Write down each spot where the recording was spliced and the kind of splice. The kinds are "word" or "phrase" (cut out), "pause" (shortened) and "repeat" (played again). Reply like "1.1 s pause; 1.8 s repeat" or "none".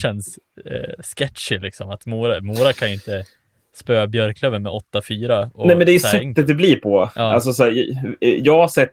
none